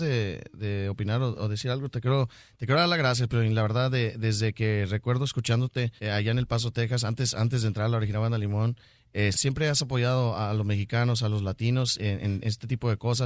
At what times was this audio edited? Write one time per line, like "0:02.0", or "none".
0:06.0
0:09.3